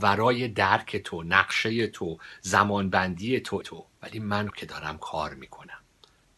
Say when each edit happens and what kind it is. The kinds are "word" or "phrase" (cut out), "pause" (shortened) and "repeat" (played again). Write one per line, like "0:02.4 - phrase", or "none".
0:03.6 - word
0:04.0 - pause
0:04.5 - word